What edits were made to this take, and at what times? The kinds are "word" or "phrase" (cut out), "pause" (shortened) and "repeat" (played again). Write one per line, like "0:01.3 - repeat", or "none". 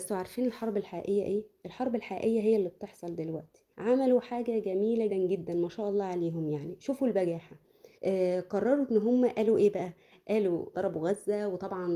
0:03.7 - pause
0:05.1 - word
0:07.9 - pause
0:10.7 - phrase